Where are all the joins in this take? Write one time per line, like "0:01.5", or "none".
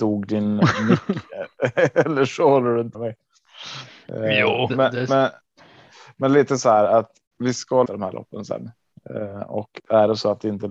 0:02.9
0:04.7
0:07.3
0:07.9